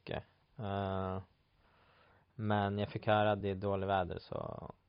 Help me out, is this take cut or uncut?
uncut